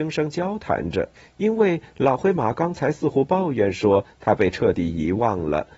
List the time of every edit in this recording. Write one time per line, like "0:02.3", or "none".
0:01.2